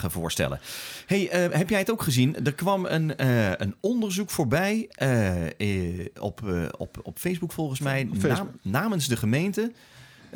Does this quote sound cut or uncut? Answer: uncut